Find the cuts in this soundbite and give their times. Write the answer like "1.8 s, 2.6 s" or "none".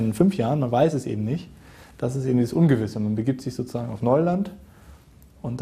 none

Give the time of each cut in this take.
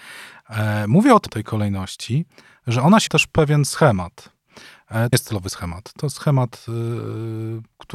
1.3 s, 3.1 s, 5.1 s

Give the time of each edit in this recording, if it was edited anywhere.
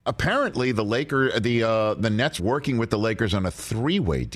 2.4 s

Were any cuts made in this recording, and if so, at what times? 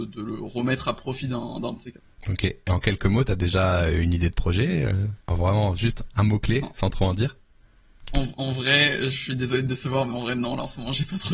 1.8 s, 5.2 s

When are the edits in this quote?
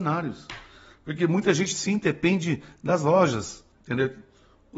3.7 s

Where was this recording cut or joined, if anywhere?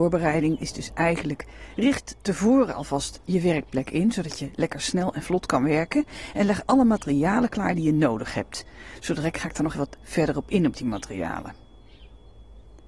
2.2 s, 9.7 s

